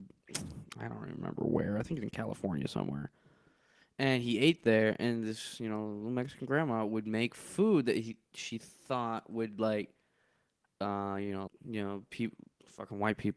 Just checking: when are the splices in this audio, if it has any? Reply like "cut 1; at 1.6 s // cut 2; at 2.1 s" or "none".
cut 1; at 11.5 s